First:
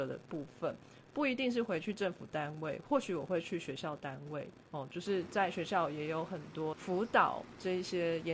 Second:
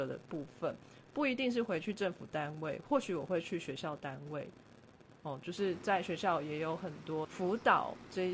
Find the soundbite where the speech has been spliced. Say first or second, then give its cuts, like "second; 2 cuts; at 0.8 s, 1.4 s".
first; 1 cut; at 4.7 s